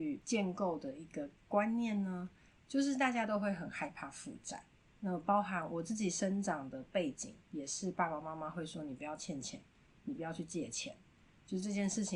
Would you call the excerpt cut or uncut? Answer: cut